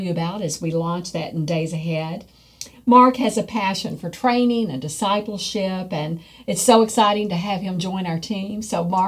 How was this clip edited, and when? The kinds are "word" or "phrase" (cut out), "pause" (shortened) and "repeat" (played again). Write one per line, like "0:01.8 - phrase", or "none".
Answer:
none